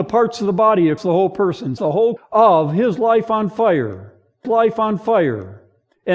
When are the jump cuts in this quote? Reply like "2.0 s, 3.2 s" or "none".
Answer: 1.0 s, 1.8 s, 2.2 s, 4.4 s